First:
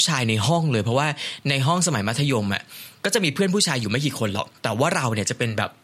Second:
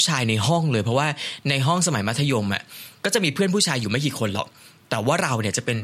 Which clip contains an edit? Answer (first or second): first